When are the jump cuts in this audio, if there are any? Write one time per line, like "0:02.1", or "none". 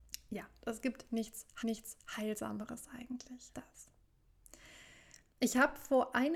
0:01.6
0:03.5